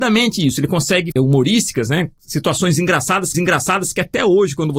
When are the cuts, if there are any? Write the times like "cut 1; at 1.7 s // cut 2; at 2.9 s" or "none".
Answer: cut 1; at 1.1 s // cut 2; at 3.3 s